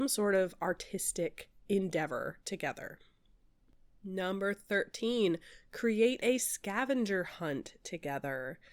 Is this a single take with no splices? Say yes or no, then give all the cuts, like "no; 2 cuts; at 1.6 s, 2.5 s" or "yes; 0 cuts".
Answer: yes; 0 cuts